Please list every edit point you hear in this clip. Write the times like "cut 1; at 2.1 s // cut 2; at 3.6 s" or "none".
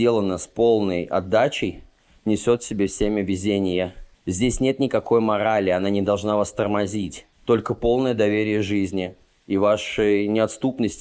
cut 1; at 4.1 s // cut 2; at 7.3 s